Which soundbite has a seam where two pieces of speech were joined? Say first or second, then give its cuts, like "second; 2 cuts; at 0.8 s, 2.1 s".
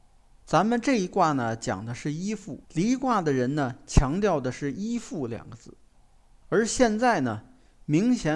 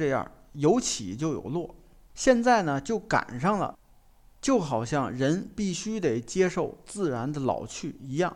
first; 1 cut; at 2.6 s